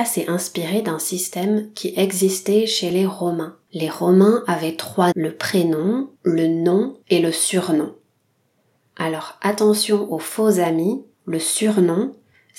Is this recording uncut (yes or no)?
no